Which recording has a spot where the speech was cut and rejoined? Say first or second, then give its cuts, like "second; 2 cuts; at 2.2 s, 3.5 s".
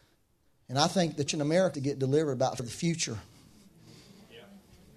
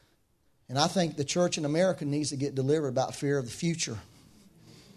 first; 3 cuts; at 1.3 s, 1.7 s, 2.6 s